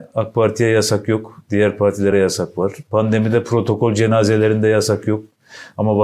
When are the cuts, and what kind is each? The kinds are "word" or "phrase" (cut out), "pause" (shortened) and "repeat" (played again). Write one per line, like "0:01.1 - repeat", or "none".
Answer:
none